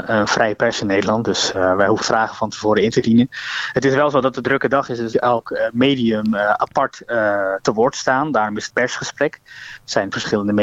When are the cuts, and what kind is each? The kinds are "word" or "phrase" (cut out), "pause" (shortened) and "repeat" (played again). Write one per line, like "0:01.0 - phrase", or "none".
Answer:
0:02.0 - word
0:04.4 - word
0:05.1 - phrase
0:08.7 - word